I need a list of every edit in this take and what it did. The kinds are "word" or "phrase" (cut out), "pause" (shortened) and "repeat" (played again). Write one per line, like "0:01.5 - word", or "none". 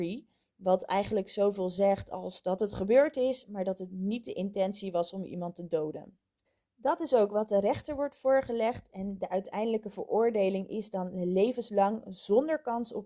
0:06.4 - pause